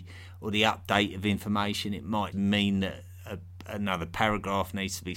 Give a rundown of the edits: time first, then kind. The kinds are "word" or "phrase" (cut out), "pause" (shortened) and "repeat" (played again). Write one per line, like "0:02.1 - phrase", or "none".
0:02.3 - word